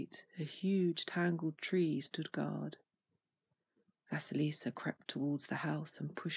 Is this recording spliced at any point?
no; 0 cuts

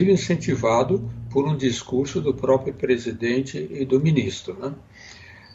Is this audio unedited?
yes; 0 cuts

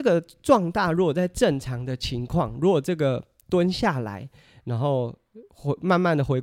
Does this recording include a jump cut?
no; 0 cuts

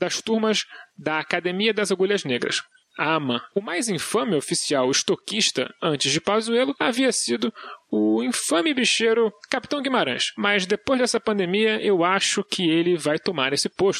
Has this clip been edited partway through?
no; 0 cuts

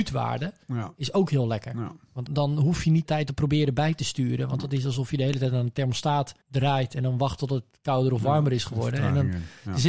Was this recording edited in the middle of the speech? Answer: yes; 3 cuts; at 2.3 s, 3.1 s, 6.4 s

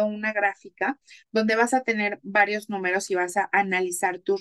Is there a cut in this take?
no; 0 cuts

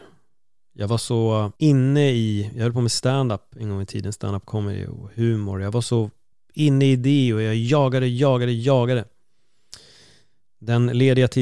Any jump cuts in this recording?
yes; 2 cuts; at 1.6 s, 6.3 s

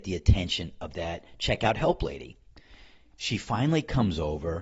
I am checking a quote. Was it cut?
no; 0 cuts

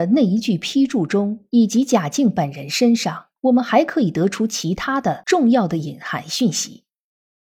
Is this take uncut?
no; 1 cut; at 3.4 s

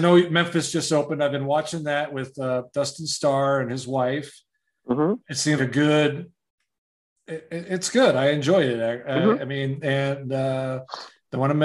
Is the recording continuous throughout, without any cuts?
no; 1 cut; at 5.6 s

